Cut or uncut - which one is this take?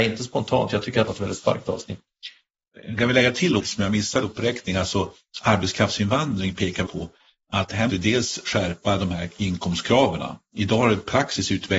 cut